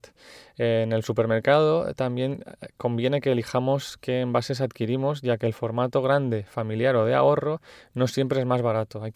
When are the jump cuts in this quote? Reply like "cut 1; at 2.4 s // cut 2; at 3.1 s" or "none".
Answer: none